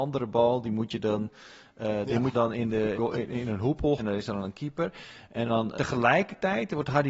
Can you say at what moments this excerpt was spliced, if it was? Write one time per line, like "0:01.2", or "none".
0:02.3
0:02.9
0:04.0
0:05.8